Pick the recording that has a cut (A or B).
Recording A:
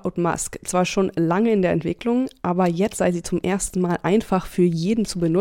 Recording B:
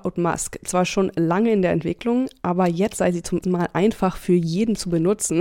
B